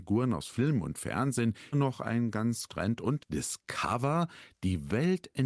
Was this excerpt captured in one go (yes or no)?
no